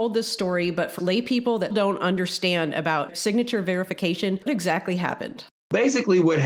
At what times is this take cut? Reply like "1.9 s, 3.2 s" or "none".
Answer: 1.0 s, 1.7 s, 4.5 s